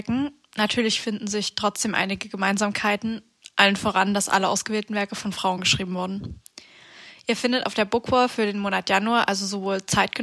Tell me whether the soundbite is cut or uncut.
uncut